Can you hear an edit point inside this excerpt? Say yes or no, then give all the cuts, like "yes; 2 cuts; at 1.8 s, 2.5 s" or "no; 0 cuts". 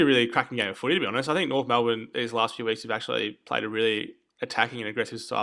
no; 0 cuts